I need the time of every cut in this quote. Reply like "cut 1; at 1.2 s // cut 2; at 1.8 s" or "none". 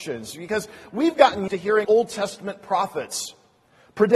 cut 1; at 1.5 s // cut 2; at 1.8 s

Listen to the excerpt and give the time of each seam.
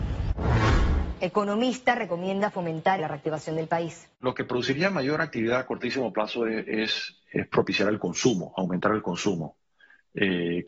cut 1; at 3.0 s // cut 2; at 4.1 s

